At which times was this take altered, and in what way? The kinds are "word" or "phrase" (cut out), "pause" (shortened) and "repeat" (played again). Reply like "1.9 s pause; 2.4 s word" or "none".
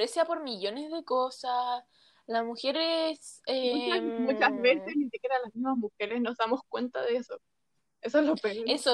none